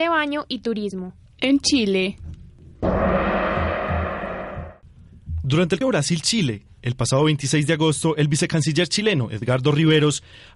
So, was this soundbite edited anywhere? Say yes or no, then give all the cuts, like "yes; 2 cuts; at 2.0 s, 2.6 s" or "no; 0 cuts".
yes; 2 cuts; at 1.3 s, 5.8 s